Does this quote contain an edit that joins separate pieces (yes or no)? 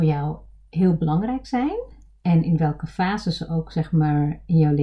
no